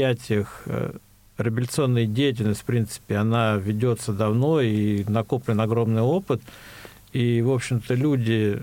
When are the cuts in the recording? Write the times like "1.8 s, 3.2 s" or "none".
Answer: none